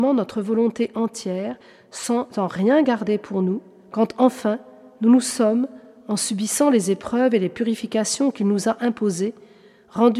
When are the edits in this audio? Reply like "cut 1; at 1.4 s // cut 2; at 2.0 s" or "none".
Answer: none